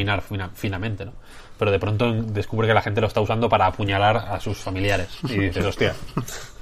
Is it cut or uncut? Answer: uncut